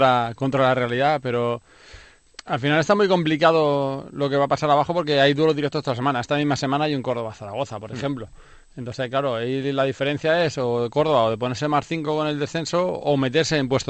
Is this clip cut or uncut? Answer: uncut